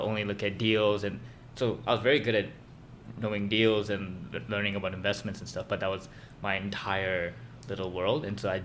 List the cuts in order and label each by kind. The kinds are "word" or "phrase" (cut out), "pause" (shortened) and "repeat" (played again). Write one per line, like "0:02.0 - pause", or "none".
none

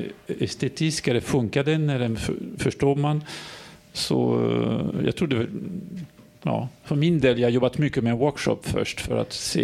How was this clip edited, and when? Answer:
none

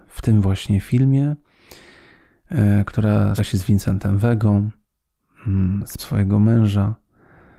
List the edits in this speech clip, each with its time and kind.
0:03.4 - word
0:06.0 - word

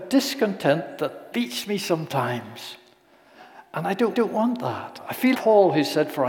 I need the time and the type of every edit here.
0:01.3 - word
0:04.1 - repeat
0:05.3 - word

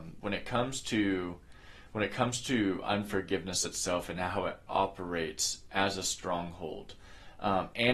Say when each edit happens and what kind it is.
none

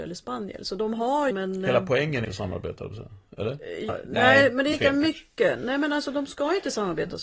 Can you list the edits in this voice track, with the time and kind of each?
0:01.3 - phrase
0:02.2 - phrase
0:03.9 - word
0:04.7 - word

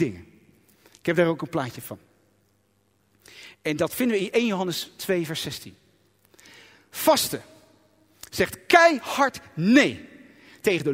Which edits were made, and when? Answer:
none

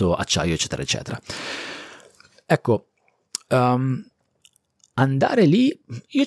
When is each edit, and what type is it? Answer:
none

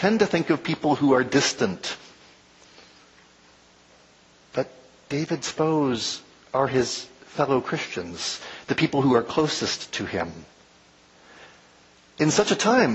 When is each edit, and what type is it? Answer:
none

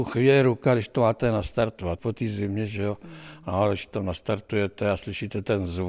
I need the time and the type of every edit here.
0:02.0 - word

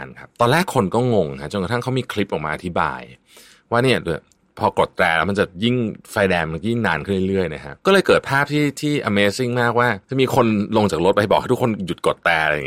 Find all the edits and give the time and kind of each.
0:06.0 - pause
0:07.8 - pause
0:10.0 - pause

